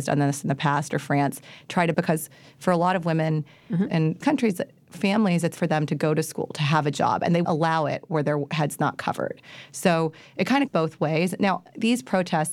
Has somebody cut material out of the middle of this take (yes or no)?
yes